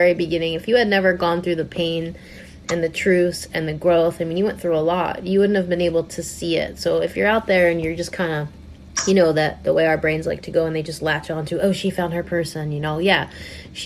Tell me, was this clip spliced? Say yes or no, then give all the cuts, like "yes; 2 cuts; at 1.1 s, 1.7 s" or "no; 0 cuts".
no; 0 cuts